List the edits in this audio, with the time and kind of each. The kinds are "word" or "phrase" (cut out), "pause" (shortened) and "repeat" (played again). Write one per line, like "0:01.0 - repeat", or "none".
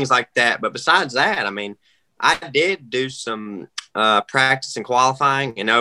none